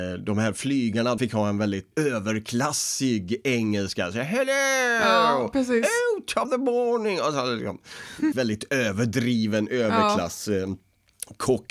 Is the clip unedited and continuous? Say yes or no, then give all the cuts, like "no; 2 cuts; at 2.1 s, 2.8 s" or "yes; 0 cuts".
no; 4 cuts; at 1.2 s, 1.9 s, 6.4 s, 8.3 s